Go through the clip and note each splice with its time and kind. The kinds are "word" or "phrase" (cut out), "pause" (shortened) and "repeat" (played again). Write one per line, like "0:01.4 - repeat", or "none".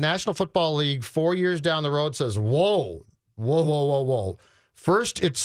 0:03.6 - word